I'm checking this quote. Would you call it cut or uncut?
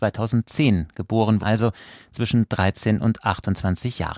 cut